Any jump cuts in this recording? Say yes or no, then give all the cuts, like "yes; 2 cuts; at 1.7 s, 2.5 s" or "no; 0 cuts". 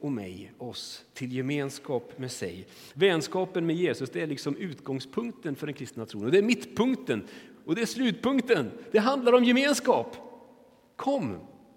no; 0 cuts